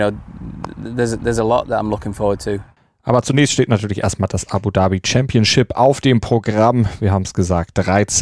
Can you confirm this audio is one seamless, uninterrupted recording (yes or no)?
yes